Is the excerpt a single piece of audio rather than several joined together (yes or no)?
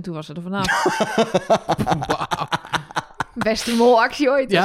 yes